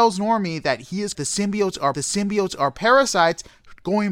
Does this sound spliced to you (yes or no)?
yes